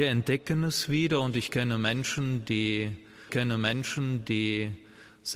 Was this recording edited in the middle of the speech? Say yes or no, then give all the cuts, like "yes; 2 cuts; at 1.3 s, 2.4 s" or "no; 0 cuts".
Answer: yes; 1 cut; at 3.3 s